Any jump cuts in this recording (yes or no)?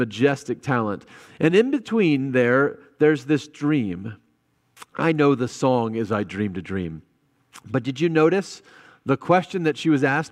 no